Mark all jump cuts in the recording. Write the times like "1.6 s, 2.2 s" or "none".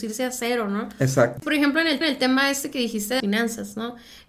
2.0 s, 3.2 s

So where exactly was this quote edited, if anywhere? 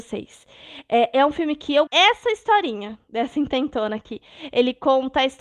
1.9 s

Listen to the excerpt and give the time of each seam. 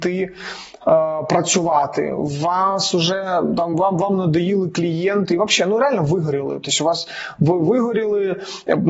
none

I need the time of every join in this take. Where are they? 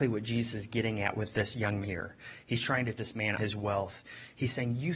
1.8 s, 3.0 s, 3.4 s

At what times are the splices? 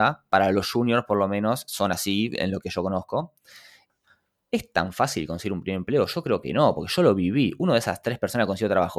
none

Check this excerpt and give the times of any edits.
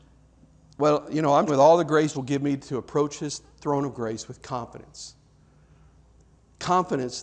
1.5 s, 2.1 s

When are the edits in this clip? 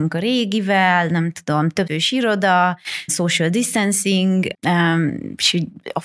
1.9 s, 3.1 s, 4.5 s

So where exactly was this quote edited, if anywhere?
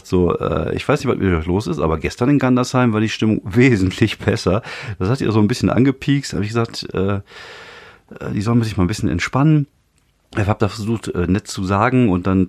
none

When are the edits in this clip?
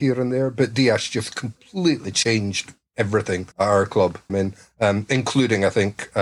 3.5 s, 4.3 s

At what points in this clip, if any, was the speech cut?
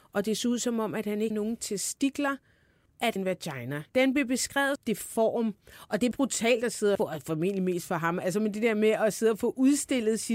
1.3 s, 2.9 s, 3.2 s, 3.9 s, 4.8 s, 6.1 s, 7.0 s

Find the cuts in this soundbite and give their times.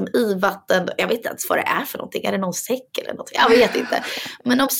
none

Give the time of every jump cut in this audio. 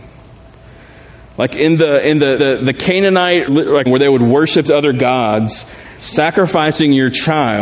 2.4 s, 3.5 s, 3.9 s, 4.6 s, 6.0 s

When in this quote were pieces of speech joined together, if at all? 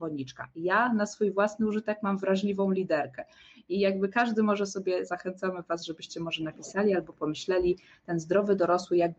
none

